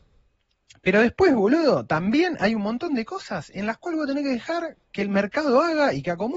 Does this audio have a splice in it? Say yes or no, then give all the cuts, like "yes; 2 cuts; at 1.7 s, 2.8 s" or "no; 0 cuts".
yes; 1 cut; at 4.8 s